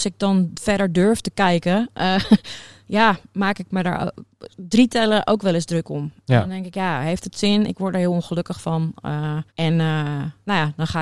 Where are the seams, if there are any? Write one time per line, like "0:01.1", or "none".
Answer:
0:09.5